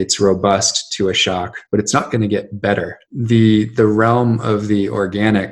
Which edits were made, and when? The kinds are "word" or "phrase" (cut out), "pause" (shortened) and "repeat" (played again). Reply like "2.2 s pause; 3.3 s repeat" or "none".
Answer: 1.7 s pause; 3.0 s pause